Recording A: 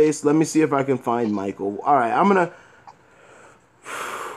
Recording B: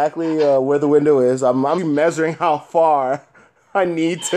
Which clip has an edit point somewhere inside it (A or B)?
B